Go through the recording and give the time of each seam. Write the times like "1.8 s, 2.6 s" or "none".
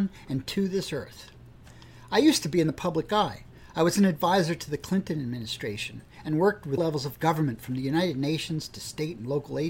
6.8 s